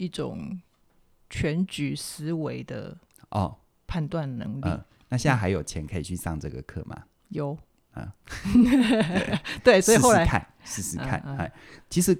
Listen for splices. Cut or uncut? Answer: uncut